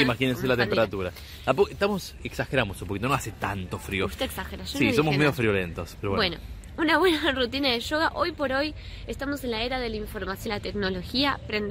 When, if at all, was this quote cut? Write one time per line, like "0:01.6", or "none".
0:10.5